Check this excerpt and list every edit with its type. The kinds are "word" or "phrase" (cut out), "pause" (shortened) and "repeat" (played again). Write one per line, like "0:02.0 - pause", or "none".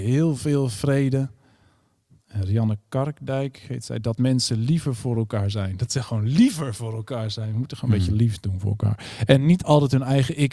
none